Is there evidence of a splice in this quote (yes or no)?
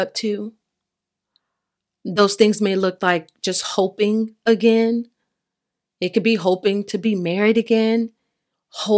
no